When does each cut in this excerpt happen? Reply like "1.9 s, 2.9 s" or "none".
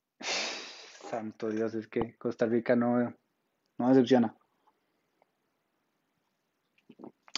none